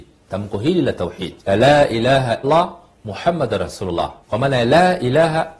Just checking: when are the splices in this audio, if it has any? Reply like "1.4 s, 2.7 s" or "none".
1.4 s, 2.4 s, 4.2 s